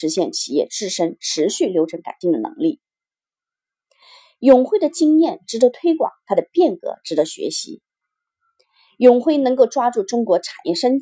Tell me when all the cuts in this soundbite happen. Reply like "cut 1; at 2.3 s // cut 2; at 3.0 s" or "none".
none